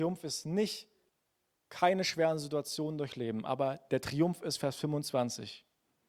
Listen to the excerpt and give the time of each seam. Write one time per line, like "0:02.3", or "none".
0:01.1